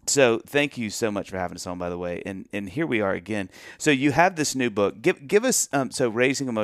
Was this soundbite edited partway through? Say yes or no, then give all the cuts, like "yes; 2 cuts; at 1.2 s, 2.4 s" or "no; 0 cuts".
no; 0 cuts